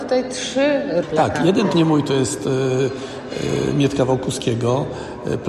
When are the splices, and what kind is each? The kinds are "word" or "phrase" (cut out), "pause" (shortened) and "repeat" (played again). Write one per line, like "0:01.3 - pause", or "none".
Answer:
0:01.0 - word
0:01.7 - word